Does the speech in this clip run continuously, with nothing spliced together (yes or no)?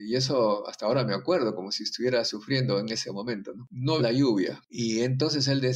no